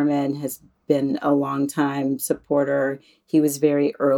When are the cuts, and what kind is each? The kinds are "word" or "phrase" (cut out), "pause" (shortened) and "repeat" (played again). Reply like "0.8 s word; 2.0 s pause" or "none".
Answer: none